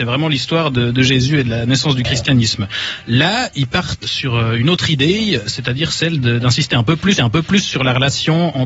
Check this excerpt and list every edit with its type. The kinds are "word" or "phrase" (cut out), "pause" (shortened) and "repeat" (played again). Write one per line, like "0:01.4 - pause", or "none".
0:04.0 - word
0:07.2 - repeat

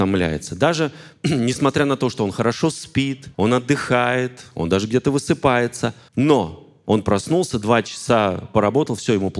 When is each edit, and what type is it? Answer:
0:03.3 - pause
0:06.1 - pause

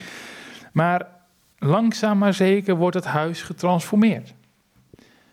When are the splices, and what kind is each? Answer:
none

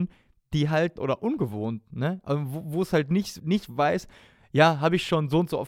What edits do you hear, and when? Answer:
0:01.0 - phrase
0:03.4 - phrase

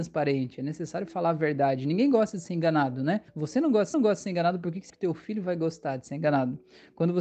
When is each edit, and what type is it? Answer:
0:03.3 - pause
0:03.9 - repeat
0:04.9 - word

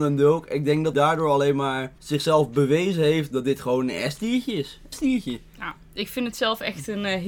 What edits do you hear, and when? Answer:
0:00.9 - word
0:02.0 - pause
0:04.9 - phrase

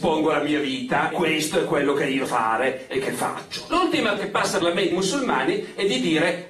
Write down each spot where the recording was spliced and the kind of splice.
0:01.1 - word
0:02.3 - word
0:04.2 - word
0:04.6 - word
0:04.9 - word

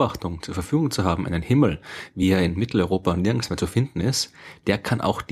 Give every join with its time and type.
none

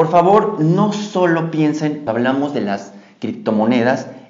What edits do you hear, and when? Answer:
0:02.1 - word

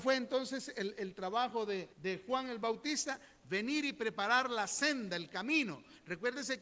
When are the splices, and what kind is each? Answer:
0:01.9 - pause

